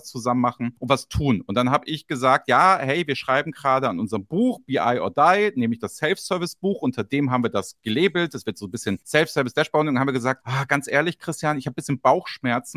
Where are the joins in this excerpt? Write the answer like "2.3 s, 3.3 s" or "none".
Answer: none